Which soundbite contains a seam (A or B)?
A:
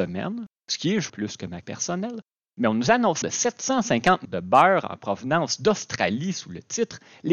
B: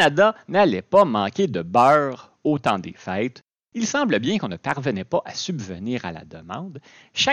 A